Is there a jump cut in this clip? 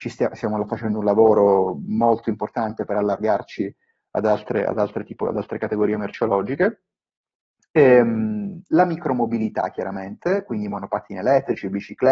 no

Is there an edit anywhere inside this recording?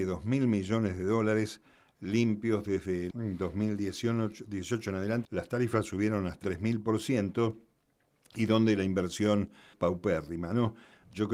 yes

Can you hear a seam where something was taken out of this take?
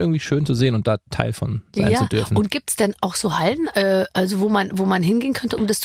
no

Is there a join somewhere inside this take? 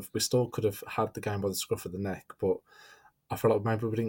no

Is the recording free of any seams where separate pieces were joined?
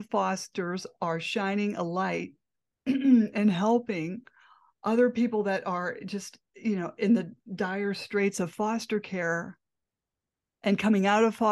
yes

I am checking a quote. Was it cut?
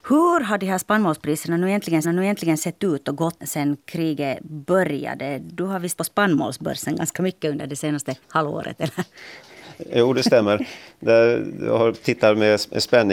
yes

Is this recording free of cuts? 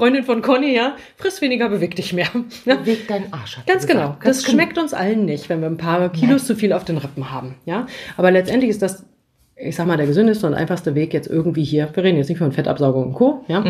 yes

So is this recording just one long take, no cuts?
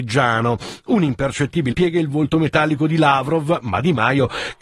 no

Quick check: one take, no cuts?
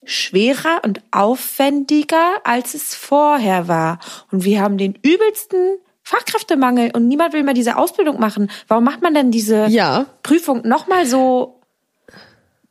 yes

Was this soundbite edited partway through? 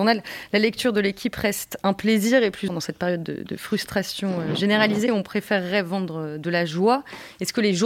yes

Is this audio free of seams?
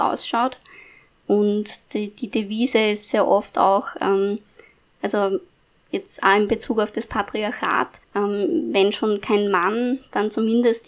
no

